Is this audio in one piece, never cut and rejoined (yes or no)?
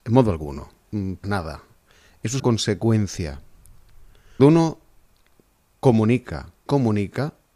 no